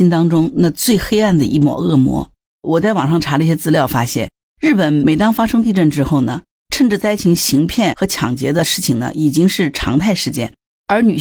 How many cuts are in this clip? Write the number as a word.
zero